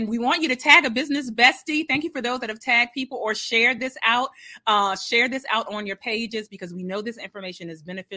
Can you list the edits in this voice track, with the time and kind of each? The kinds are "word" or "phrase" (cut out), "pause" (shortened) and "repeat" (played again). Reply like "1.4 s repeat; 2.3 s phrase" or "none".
none

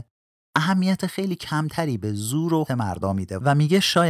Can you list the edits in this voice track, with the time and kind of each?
2.7 s word

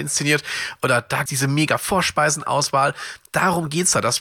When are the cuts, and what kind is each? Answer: 1.3 s word

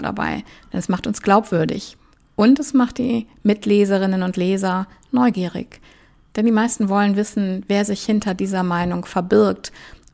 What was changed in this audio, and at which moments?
none

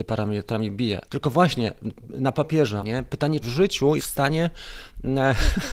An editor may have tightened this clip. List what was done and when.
1.1 s word; 2.8 s word; 3.4 s word; 4.0 s word

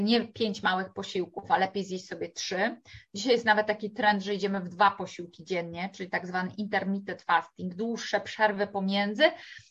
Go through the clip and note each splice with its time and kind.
none

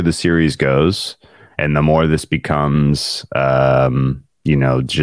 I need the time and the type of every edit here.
none

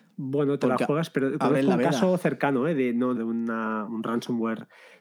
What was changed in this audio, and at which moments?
3.2 s phrase; 3.9 s word

